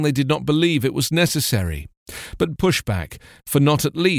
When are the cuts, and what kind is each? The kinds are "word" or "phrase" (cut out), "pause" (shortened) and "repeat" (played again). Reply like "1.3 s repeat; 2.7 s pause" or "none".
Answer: 2.6 s phrase